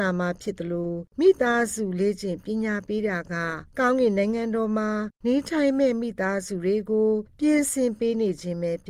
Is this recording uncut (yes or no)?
no